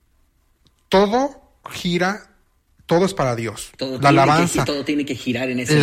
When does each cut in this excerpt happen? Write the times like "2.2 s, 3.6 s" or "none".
none